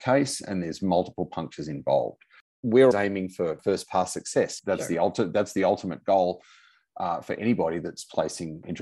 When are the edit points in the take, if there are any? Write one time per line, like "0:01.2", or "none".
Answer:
0:02.9